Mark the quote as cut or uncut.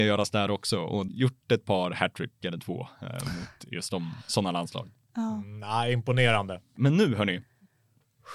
cut